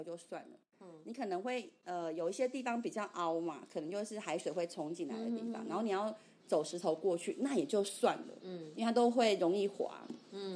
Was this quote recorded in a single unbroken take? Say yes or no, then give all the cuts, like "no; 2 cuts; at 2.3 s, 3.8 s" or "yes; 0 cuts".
yes; 0 cuts